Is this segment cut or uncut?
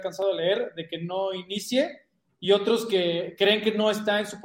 uncut